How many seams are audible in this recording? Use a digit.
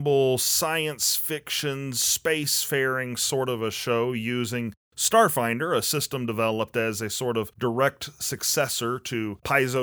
0